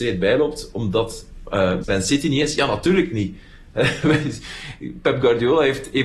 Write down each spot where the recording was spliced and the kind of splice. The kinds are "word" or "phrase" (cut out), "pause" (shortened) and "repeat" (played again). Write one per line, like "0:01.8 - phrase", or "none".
0:01.8 - word